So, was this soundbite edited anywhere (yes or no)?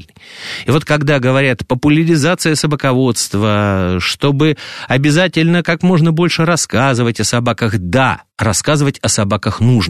yes